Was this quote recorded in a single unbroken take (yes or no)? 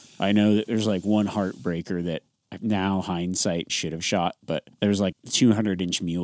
no